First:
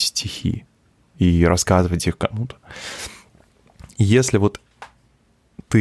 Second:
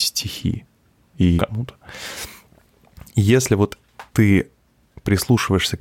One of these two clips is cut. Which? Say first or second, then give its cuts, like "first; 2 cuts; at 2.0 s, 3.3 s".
second; 2 cuts; at 1.4 s, 4.1 s